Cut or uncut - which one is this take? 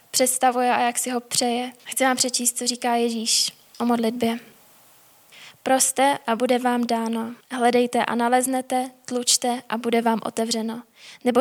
cut